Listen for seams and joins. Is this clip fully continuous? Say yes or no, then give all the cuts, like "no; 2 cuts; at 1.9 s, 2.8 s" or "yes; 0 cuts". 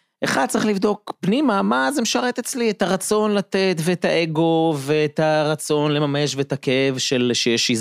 yes; 0 cuts